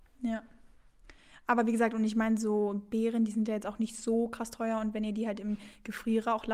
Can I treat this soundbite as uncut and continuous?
yes; 0 cuts

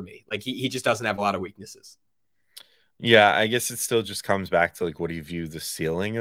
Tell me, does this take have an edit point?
no; 0 cuts

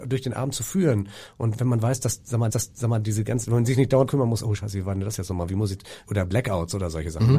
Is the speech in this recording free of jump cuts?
no; 4 cuts; at 1.6 s, 2.5 s, 4.1 s, 6.1 s

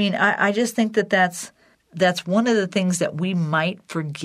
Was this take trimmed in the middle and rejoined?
yes; 1 cut; at 1.7 s

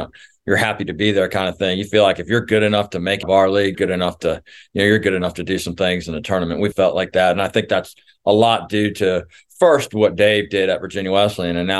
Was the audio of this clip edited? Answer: yes; 3 cuts; at 3.2 s, 3.7 s, 6.7 s

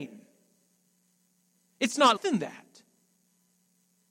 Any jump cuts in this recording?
yes; 1 cut; at 2.2 s

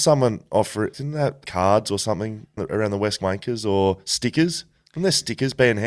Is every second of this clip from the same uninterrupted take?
no; 4 cuts; at 0.9 s, 1.4 s, 2.6 s, 3.2 s

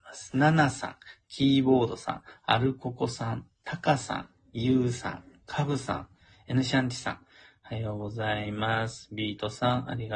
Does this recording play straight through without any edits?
yes; 0 cuts

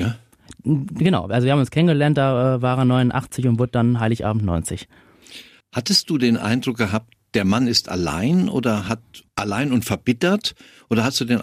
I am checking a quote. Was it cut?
yes; 2 cuts; at 5.6 s, 9.3 s

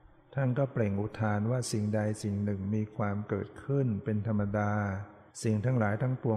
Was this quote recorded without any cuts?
no; 1 cut; at 5.3 s

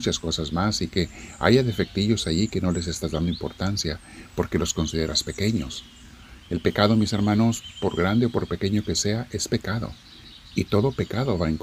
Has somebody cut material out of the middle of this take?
yes; 1 cut; at 6.4 s

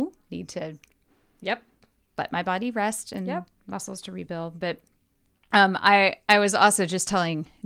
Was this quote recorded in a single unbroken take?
yes; 0 cuts

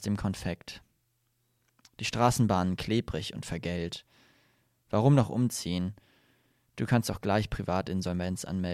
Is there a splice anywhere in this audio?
no; 0 cuts

